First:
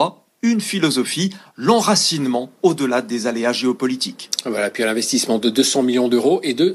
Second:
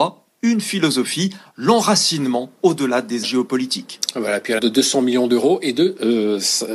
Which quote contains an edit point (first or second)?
second